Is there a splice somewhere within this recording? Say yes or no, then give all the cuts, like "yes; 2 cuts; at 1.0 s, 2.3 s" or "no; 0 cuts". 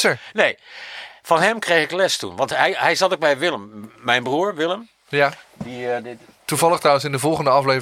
no; 0 cuts